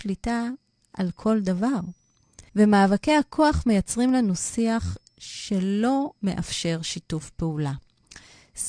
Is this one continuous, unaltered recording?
no; 2 cuts; at 2.5 s, 6.2 s

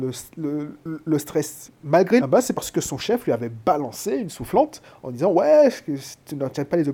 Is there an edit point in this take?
yes; 1 cut; at 2.2 s

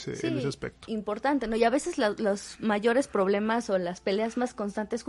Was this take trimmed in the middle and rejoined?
no; 0 cuts

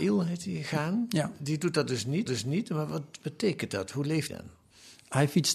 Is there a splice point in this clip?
yes; 2 cuts; at 2.3 s, 4.3 s

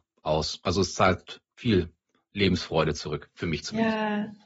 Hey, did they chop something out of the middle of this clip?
no; 0 cuts

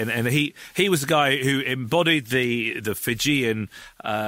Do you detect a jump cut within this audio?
no; 0 cuts

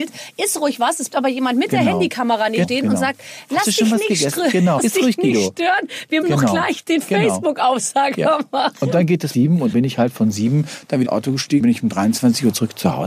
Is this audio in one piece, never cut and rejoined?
no; 8 cuts; at 1.1 s, 2.6 s, 4.8 s, 6.2 s, 9.3 s, 9.7 s, 11.0 s, 11.6 s

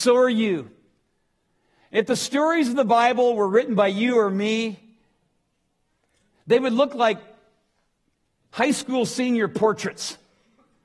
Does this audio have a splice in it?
no; 0 cuts

